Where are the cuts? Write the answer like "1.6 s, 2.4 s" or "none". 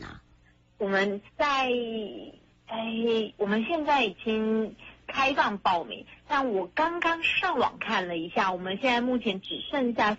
1.3 s